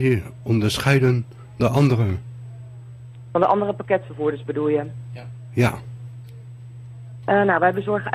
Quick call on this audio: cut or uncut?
cut